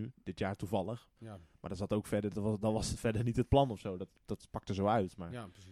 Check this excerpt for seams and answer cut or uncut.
uncut